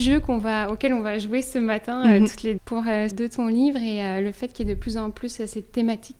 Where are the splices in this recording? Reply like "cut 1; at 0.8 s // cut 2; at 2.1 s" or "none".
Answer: cut 1; at 2.6 s // cut 2; at 3.1 s